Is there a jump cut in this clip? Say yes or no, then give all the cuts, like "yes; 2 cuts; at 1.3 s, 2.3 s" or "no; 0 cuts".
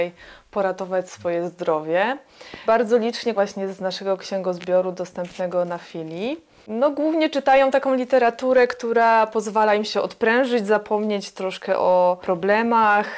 yes; 2 cuts; at 2.7 s, 3.4 s